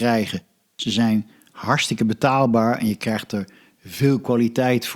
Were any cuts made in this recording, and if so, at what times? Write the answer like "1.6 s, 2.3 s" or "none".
none